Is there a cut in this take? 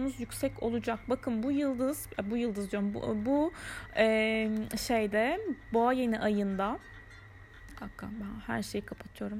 no; 0 cuts

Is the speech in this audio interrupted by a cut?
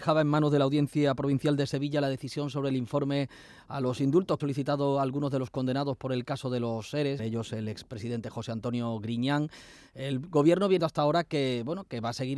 yes; 3 cuts; at 4.4 s, 7.2 s, 10.8 s

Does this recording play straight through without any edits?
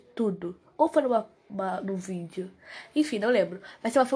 yes; 0 cuts

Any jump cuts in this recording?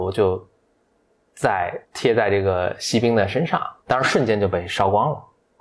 yes; 2 cuts; at 1.8 s, 3.8 s

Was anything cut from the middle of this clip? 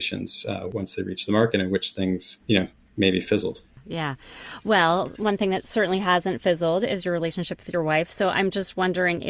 yes; 1 cut; at 2.4 s

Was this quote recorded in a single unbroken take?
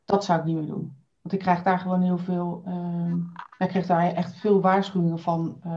no; 1 cut; at 1.1 s

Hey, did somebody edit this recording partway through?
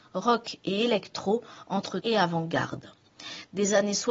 yes; 1 cut; at 2.0 s

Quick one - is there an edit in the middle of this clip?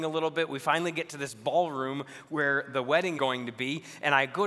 yes; 1 cut; at 3.1 s

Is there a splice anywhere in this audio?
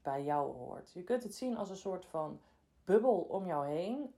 no; 0 cuts

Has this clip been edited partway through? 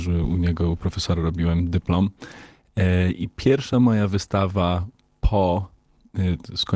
no; 0 cuts

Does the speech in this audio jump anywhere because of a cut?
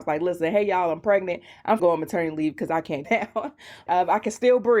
yes; 3 cuts; at 1.8 s, 3.0 s, 3.9 s

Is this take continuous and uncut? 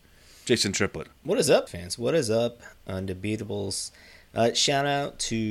no; 2 cuts; at 1.2 s, 1.7 s

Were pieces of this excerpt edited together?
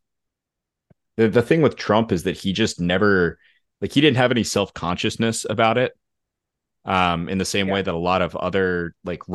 no; 0 cuts

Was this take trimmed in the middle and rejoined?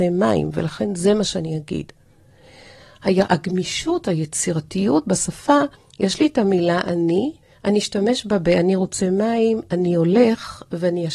yes; 2 cuts; at 5.7 s, 7.4 s

